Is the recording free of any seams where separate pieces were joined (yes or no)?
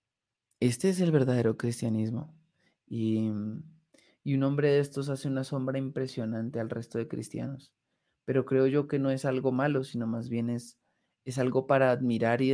yes